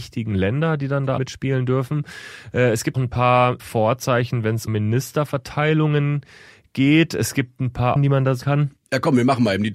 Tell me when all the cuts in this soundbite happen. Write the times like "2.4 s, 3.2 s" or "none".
1.2 s, 2.9 s, 3.6 s, 4.7 s, 8.0 s, 8.4 s